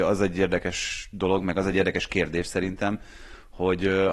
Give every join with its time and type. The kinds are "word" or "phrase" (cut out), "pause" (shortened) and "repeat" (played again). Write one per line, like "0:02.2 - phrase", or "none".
none

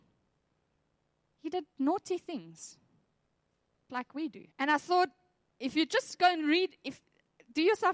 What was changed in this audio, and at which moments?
0:03.9 - word
0:04.5 - pause

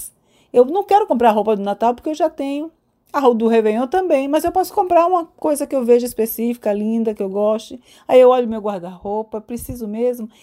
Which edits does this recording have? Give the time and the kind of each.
none

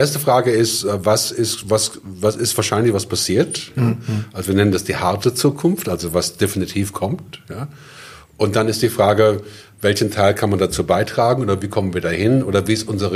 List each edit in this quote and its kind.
none

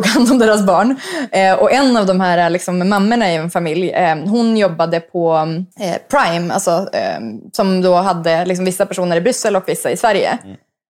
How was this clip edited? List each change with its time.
0:05.7 - pause

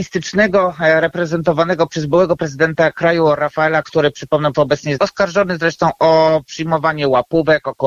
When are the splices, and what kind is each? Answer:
0:03.8 - word
0:04.5 - word
0:05.0 - phrase

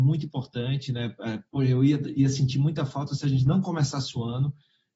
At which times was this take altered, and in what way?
0:01.5 - pause

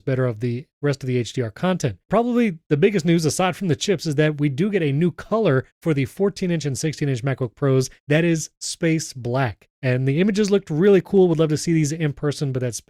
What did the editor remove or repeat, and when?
0:02.1 - word

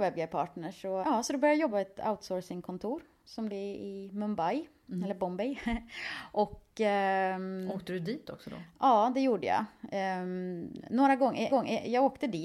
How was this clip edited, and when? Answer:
0:01.0 - word
0:01.7 - phrase
0:03.5 - word
0:11.5 - repeat

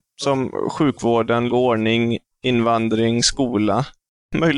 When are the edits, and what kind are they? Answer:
0:01.5 - word

